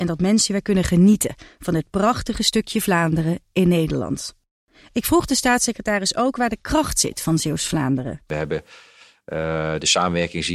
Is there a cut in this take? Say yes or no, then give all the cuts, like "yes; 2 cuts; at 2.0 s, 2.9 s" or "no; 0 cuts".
no; 0 cuts